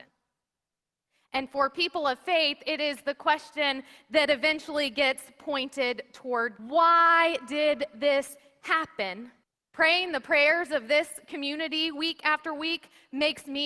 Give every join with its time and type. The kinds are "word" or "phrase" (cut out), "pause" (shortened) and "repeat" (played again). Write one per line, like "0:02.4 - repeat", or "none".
0:06.6 - word
0:09.4 - pause